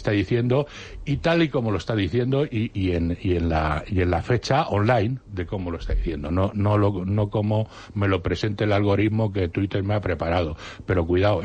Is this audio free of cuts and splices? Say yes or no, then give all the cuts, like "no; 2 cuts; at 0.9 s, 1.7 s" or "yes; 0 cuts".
no; 1 cut; at 5.2 s